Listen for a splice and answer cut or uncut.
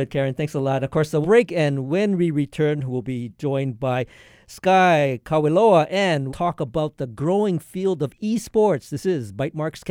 cut